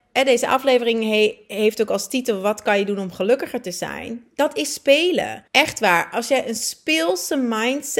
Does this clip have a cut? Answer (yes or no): yes